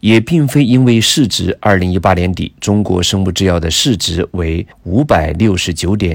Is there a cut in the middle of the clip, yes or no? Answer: yes